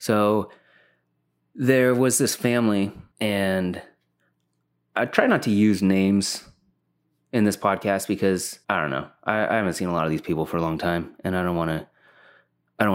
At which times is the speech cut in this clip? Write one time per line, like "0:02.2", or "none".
0:03.1
0:08.6